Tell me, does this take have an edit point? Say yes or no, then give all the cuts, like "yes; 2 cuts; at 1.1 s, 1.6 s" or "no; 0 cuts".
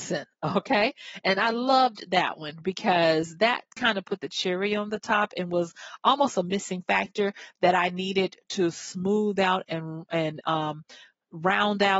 no; 0 cuts